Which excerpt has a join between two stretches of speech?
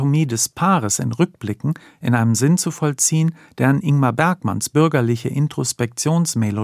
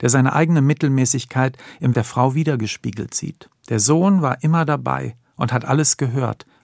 second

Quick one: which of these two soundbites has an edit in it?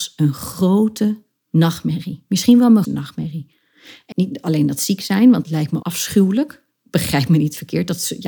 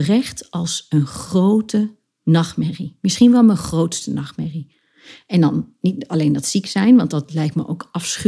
first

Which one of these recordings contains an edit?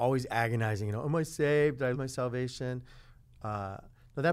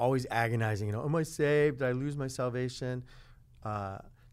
first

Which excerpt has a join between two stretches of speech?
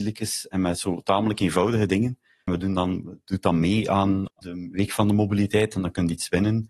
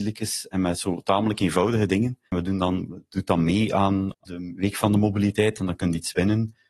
second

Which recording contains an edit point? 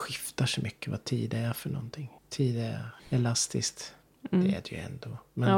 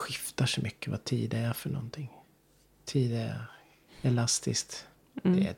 first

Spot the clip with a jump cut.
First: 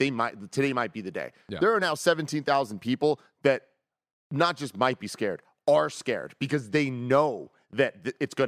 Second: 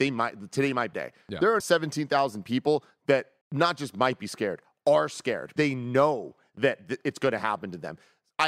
second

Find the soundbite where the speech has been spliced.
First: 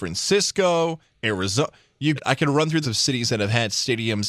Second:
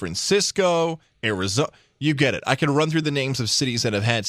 first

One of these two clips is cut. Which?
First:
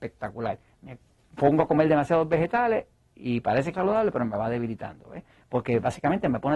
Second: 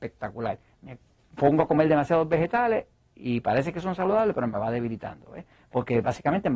first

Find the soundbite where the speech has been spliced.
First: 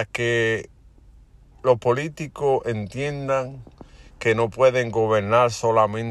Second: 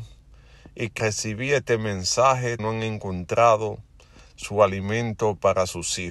second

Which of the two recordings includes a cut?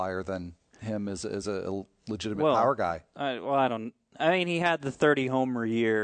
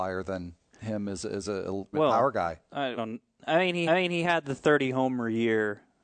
second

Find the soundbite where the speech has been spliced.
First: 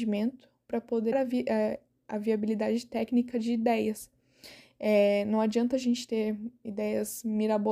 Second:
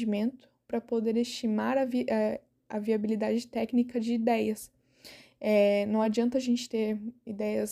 first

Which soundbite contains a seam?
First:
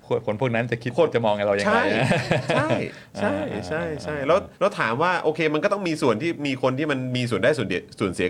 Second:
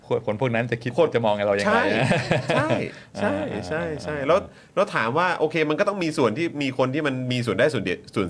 first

